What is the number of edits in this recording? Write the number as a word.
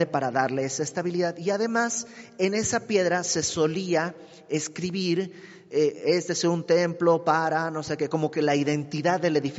zero